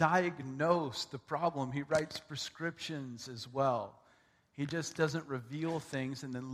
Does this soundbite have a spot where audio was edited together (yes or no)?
no